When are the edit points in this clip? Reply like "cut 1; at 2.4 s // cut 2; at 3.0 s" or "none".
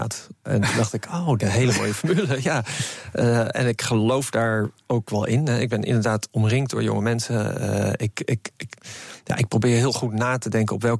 cut 1; at 1.4 s